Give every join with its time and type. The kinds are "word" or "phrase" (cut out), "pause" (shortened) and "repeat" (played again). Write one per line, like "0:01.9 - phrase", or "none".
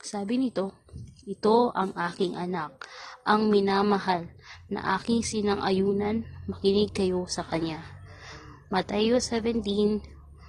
none